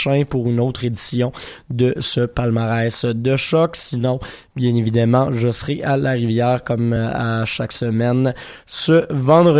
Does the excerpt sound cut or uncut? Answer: uncut